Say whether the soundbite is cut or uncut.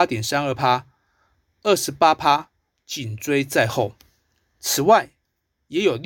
uncut